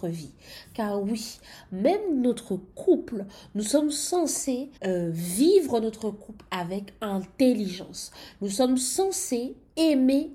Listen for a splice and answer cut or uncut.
cut